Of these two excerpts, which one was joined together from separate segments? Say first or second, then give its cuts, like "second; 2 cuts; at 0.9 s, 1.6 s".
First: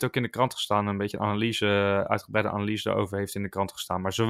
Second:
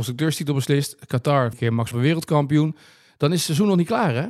second; 2 cuts; at 1.5 s, 1.9 s